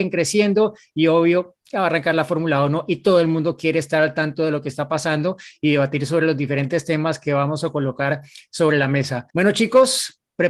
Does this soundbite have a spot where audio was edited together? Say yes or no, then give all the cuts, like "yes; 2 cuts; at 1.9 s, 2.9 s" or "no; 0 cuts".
yes; 2 cuts; at 1.6 s, 9.3 s